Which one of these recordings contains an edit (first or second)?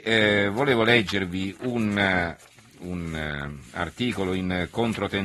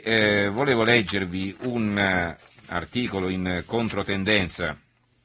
second